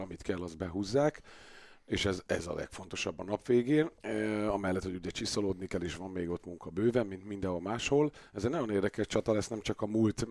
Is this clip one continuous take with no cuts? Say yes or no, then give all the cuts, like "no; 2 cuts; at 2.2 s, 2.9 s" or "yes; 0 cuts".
no; 1 cut; at 4.0 s